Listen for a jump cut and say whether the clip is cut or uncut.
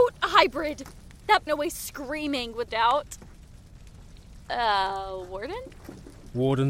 cut